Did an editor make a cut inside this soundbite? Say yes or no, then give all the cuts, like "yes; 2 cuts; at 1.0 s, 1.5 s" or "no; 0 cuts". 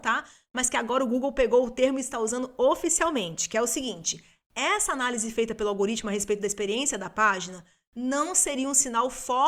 no; 0 cuts